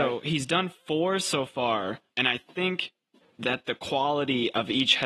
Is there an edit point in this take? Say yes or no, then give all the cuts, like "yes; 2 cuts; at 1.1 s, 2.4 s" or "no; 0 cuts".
yes; 1 cut; at 2.1 s